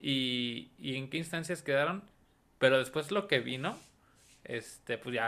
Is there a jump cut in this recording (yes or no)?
no